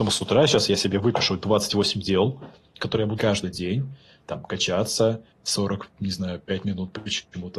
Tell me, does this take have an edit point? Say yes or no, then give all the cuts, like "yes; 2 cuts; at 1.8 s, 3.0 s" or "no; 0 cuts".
yes; 2 cuts; at 3.2 s, 5.3 s